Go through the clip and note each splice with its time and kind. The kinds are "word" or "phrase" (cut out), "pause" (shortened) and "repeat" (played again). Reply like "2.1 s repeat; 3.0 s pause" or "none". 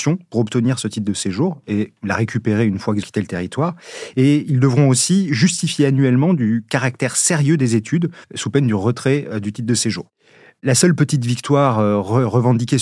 3.0 s word; 8.2 s pause